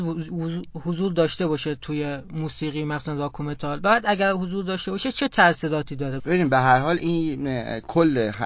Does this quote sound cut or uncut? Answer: cut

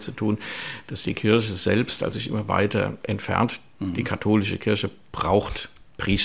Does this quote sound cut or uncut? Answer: cut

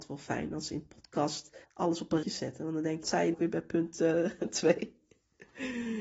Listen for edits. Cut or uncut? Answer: cut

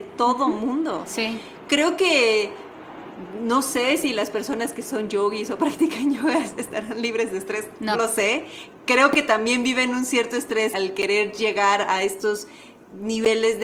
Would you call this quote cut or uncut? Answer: cut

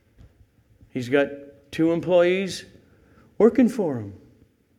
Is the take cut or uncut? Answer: uncut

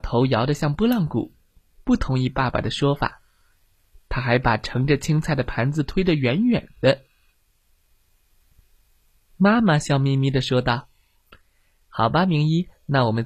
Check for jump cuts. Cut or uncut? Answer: uncut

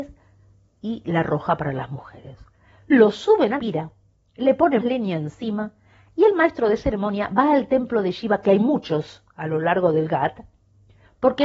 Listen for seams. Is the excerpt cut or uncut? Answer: cut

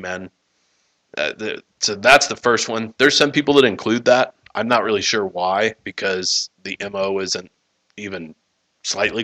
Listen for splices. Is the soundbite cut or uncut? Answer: uncut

